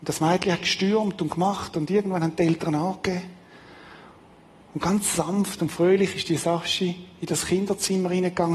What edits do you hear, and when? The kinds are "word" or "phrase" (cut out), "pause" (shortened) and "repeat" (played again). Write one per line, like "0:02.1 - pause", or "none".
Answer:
none